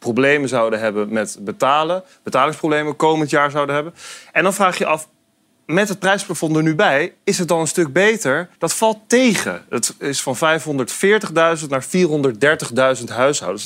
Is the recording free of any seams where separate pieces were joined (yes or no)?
no